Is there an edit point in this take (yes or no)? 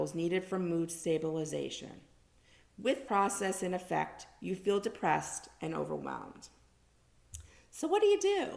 yes